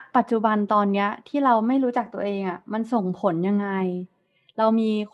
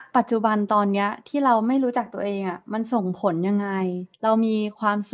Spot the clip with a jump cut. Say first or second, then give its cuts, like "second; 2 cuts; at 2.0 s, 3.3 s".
second; 1 cut; at 4.1 s